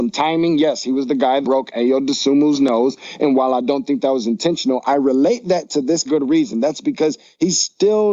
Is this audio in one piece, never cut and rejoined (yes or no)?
no